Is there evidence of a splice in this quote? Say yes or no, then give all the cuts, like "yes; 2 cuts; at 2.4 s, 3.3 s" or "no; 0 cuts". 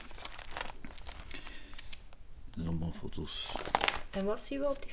no; 0 cuts